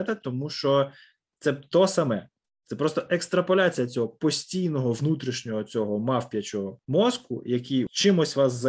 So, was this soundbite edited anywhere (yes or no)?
no